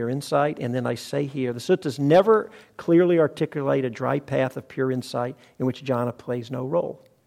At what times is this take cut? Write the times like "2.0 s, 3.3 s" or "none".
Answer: none